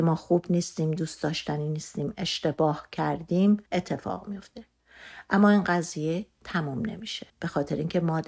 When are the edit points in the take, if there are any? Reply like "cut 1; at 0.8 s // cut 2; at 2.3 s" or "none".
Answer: cut 1; at 3.7 s // cut 2; at 7.3 s